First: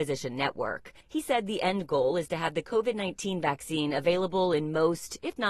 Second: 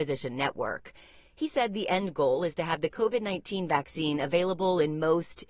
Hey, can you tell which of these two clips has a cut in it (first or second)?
first